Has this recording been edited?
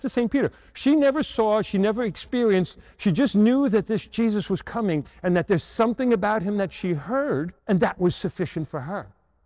yes; 1 cut; at 7.6 s

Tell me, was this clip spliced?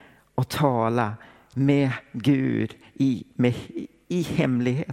no; 0 cuts

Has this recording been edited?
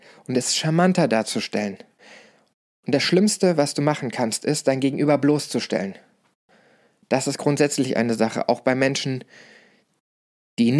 no; 0 cuts

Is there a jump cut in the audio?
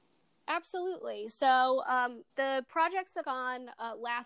yes; 2 cuts; at 2.3 s, 3.2 s

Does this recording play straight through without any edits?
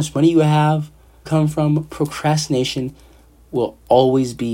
no; 1 cut; at 1.3 s

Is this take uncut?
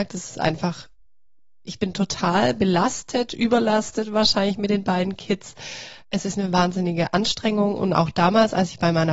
no; 1 cut; at 6.0 s

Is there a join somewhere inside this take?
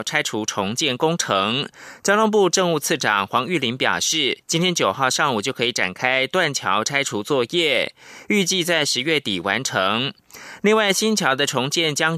no; 0 cuts

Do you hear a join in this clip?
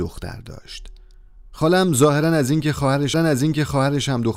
yes; 1 cut; at 3.1 s

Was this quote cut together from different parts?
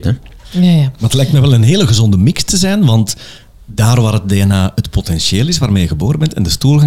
no; 0 cuts

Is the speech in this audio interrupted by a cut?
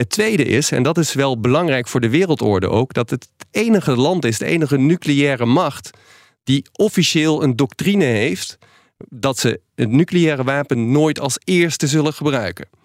no; 0 cuts

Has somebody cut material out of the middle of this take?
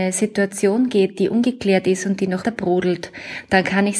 yes; 1 cut; at 2.4 s

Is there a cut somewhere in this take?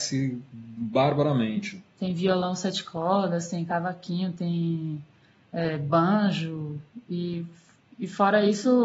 no; 0 cuts

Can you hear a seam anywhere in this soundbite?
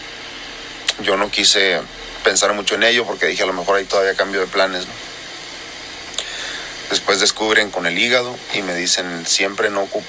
yes; 1 cut; at 7.7 s

